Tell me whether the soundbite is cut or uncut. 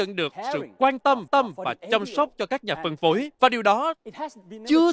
cut